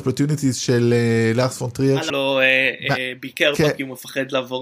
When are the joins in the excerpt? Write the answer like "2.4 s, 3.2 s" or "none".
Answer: 2.1 s